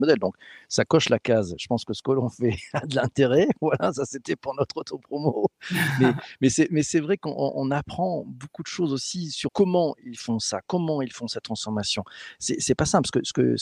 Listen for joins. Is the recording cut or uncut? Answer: cut